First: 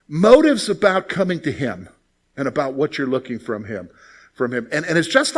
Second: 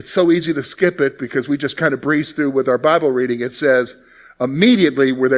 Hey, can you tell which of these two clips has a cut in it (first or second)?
first